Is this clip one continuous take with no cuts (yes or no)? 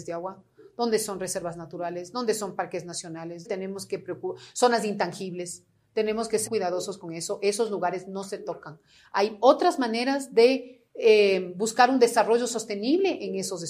no